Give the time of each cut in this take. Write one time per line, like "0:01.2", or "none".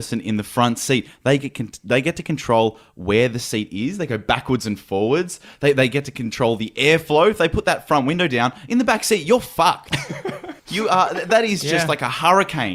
0:10.6